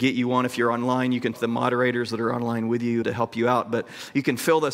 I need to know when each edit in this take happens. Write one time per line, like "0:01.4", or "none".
0:01.3
0:03.0